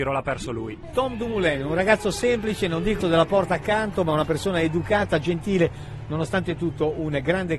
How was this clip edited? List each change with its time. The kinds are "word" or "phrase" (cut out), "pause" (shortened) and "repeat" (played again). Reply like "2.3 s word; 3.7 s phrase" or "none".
3.0 s word